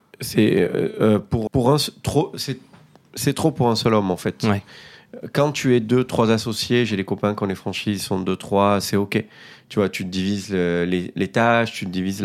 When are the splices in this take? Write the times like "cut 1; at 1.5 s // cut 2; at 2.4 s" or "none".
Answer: cut 1; at 1.5 s